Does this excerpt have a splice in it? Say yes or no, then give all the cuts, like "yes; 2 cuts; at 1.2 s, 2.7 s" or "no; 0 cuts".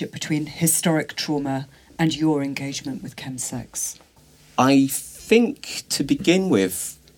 no; 0 cuts